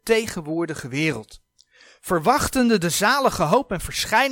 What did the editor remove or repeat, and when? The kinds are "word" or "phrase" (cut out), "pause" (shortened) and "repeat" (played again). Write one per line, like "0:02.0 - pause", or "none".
none